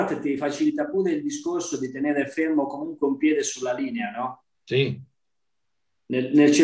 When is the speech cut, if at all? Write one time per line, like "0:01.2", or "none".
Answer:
0:04.5